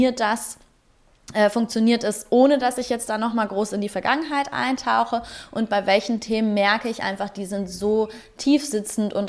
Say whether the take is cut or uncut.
uncut